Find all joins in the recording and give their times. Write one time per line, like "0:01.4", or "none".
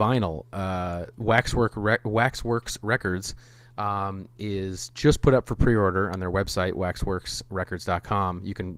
none